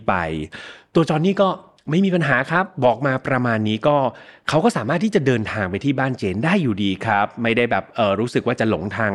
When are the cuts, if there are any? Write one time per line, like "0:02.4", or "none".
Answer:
none